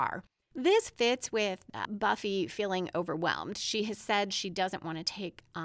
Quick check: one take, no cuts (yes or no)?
yes